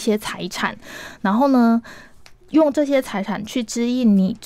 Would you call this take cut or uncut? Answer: uncut